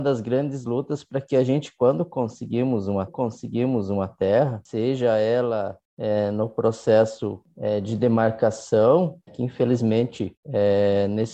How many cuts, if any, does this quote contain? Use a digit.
2